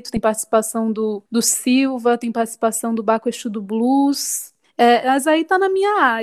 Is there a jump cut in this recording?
yes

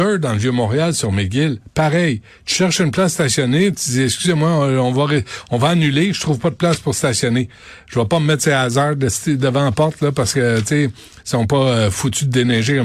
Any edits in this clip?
no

